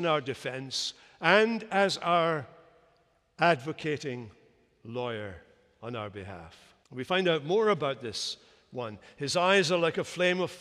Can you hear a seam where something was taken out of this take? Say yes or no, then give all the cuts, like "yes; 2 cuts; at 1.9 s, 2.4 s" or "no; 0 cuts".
yes; 1 cut; at 6.8 s